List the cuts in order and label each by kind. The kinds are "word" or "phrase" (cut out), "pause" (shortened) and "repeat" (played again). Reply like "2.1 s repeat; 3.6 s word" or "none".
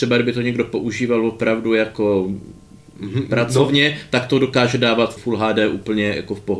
5.2 s word